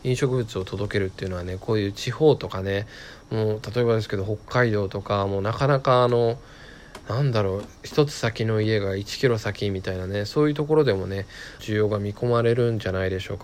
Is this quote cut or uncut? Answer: cut